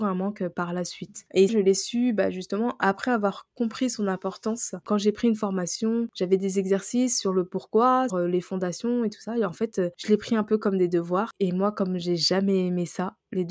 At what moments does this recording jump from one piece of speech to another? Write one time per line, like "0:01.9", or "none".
0:01.5
0:08.1